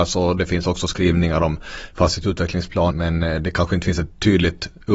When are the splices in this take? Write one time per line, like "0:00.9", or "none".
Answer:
0:02.9